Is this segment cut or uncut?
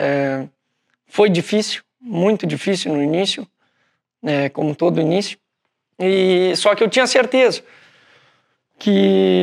uncut